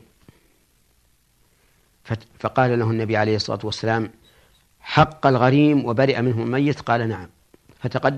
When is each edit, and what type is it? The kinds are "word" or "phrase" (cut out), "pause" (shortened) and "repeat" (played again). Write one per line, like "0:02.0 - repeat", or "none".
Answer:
none